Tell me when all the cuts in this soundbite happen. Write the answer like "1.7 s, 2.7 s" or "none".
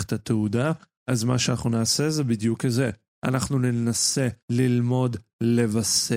4.4 s

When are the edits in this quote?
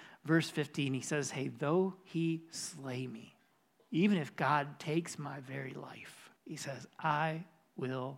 3.5 s, 6.4 s

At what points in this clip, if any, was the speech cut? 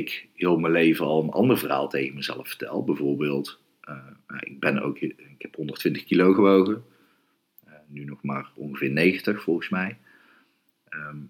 none

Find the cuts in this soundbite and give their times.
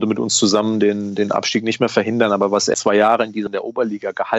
2.7 s, 3.5 s

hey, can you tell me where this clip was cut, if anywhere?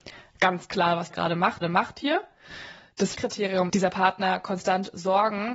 1.1 s, 1.6 s, 3.1 s, 3.7 s

